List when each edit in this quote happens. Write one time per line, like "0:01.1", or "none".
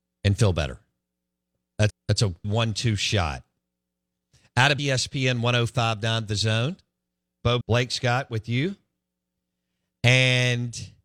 0:01.9
0:02.4
0:04.8
0:07.6